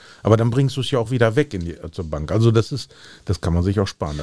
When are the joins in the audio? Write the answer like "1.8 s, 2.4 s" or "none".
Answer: none